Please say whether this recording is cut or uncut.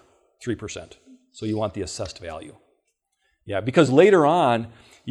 uncut